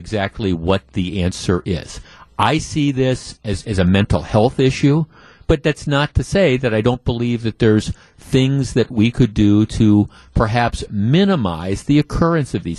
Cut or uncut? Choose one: uncut